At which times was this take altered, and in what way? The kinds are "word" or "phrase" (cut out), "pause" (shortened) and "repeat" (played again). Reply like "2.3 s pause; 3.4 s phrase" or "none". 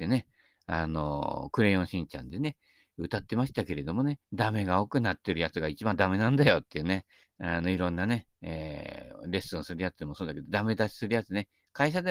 4.2 s pause; 7.2 s pause; 8.3 s pause